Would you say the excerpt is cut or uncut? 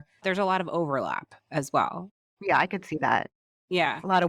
uncut